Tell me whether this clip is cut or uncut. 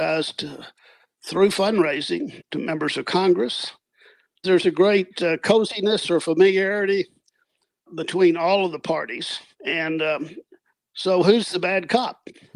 uncut